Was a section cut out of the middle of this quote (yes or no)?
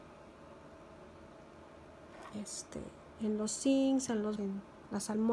yes